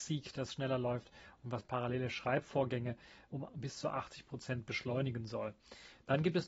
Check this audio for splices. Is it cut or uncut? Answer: uncut